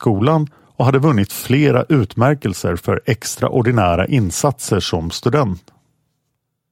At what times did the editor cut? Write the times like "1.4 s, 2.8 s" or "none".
none